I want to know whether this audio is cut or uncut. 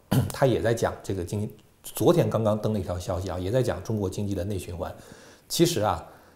uncut